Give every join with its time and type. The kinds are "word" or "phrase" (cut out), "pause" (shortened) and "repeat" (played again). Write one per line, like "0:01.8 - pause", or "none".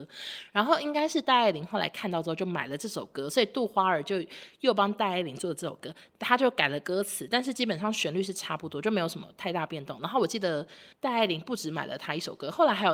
0:10.9 - pause